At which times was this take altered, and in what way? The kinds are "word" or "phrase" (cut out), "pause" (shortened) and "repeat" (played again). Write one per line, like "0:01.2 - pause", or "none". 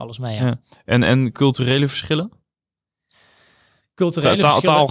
none